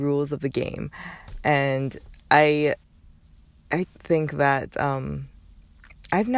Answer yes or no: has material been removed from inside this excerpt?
yes